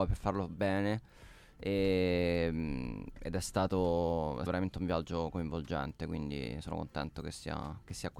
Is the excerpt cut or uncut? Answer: cut